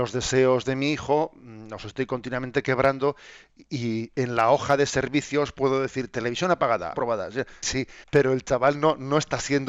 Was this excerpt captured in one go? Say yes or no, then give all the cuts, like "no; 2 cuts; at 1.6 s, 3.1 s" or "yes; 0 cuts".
no; 3 cuts; at 6.9 s, 7.6 s, 8.0 s